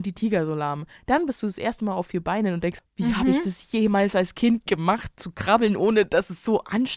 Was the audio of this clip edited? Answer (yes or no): yes